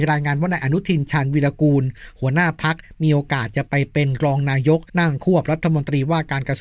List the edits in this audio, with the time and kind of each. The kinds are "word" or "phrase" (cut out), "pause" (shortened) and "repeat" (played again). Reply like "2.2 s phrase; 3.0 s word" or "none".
4.9 s pause